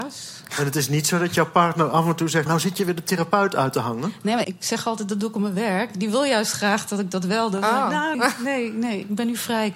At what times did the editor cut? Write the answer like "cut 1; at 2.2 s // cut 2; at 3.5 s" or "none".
cut 1; at 2.5 s // cut 2; at 4.4 s // cut 3; at 8.1 s